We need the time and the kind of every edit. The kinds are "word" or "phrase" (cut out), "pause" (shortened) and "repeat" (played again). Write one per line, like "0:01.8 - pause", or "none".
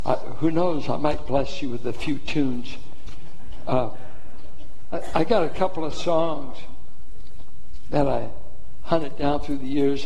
none